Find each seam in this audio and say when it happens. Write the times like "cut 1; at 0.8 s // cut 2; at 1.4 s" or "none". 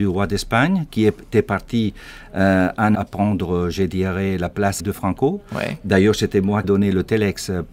cut 1; at 2.9 s // cut 2; at 4.8 s // cut 3; at 6.6 s